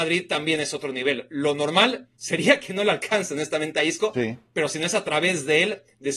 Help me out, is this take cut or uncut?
cut